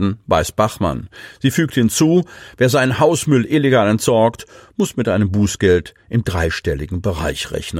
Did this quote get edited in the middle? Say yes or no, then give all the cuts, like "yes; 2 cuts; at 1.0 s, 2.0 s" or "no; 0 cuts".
no; 0 cuts